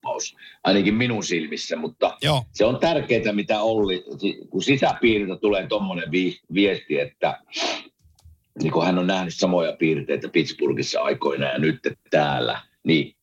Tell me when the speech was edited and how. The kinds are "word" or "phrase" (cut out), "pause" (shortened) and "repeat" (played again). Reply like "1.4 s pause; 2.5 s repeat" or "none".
none